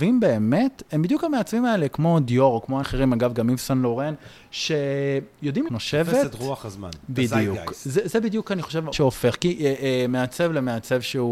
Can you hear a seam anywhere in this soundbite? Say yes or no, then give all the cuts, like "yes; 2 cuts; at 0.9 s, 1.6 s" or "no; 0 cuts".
yes; 3 cuts; at 2.8 s, 5.7 s, 8.9 s